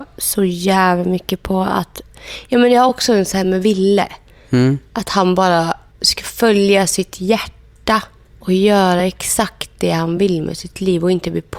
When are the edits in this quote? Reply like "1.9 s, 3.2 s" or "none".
none